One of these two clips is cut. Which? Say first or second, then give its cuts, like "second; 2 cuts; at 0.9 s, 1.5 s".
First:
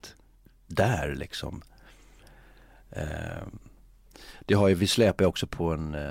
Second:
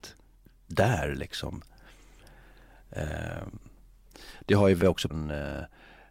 second; 2 cuts; at 4.8 s, 5.1 s